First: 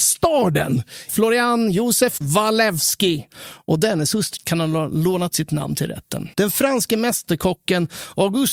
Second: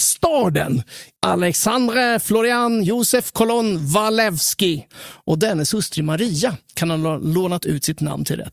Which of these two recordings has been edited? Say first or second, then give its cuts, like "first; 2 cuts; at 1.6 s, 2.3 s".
first; 5 cuts; at 1.1 s, 2.2 s, 4.4 s, 5.3 s, 6.3 s